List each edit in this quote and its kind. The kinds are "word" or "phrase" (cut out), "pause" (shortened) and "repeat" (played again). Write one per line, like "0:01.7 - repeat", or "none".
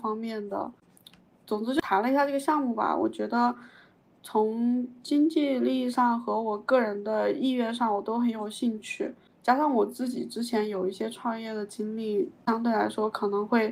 none